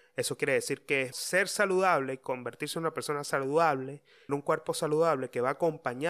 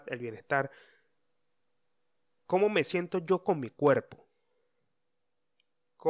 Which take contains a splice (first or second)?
first